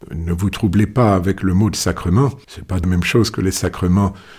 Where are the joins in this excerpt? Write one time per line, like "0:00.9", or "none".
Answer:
0:02.4